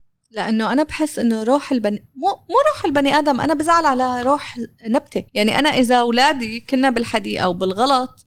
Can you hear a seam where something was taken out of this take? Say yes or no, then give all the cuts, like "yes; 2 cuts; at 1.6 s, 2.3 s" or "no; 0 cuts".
yes; 1 cut; at 5.3 s